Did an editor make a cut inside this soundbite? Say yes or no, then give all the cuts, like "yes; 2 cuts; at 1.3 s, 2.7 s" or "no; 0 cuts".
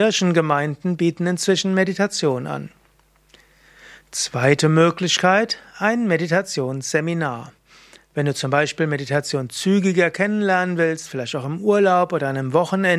no; 0 cuts